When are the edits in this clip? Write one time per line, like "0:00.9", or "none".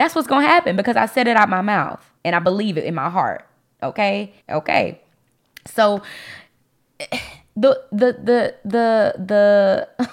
0:02.2
0:04.4